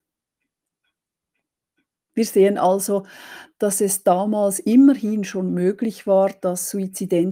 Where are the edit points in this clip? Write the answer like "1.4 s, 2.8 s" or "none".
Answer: none